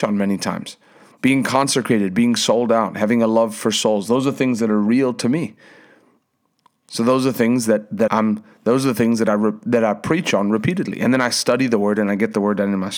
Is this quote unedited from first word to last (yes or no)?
no